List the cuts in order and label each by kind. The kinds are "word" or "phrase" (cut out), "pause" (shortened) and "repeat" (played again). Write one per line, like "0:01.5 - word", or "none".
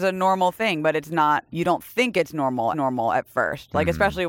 0:01.5 - pause
0:02.7 - repeat